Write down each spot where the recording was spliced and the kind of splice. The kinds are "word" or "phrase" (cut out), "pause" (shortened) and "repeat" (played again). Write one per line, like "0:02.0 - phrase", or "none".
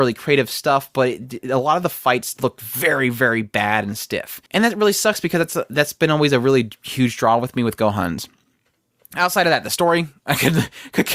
0:04.5 - pause